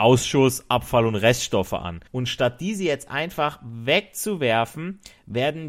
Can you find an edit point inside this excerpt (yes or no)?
yes